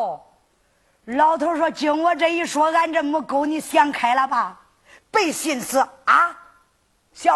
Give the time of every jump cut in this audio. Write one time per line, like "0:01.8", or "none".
none